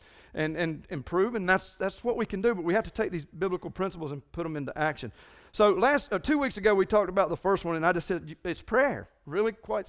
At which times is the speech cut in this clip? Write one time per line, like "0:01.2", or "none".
none